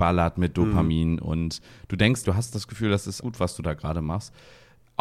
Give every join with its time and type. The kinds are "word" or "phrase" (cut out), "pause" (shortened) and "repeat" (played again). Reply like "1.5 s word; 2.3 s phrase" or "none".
2.2 s word; 3.2 s word